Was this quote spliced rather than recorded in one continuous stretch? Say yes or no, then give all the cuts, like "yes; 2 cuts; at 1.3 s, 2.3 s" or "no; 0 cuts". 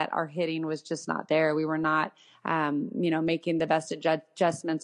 no; 0 cuts